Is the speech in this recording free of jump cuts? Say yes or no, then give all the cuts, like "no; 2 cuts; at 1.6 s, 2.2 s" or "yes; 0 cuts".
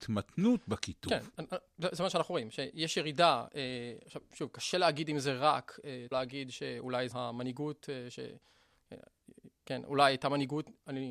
no; 2 cuts; at 6.1 s, 7.1 s